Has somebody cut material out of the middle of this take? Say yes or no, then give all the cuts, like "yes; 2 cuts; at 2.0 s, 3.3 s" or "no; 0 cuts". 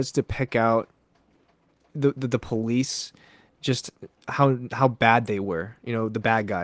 no; 0 cuts